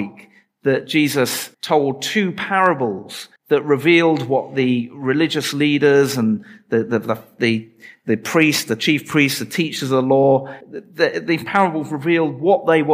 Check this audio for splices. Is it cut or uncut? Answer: cut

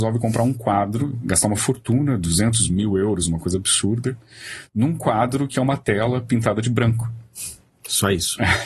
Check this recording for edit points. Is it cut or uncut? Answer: uncut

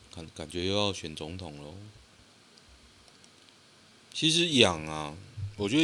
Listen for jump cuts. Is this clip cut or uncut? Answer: uncut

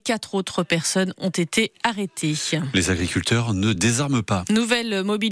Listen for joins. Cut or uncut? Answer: uncut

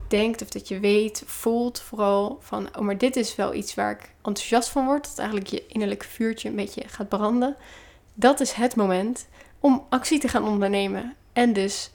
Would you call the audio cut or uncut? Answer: uncut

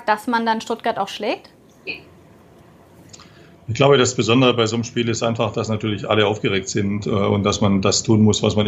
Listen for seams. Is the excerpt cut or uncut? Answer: uncut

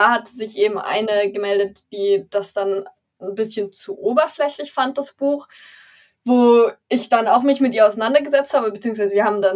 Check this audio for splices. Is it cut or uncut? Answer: uncut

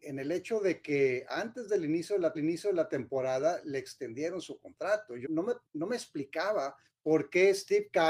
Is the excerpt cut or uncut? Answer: cut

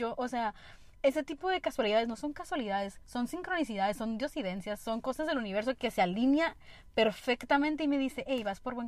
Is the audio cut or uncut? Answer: cut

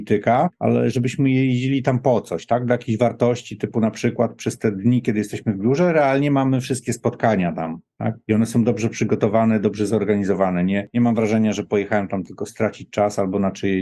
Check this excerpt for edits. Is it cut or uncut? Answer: uncut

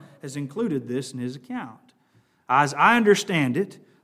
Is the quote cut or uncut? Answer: uncut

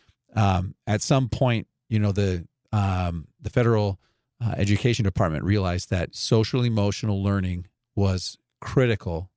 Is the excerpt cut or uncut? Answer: uncut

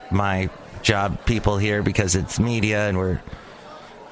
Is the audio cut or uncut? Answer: cut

